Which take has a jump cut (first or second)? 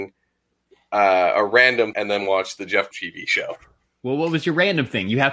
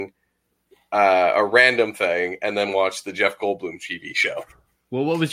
first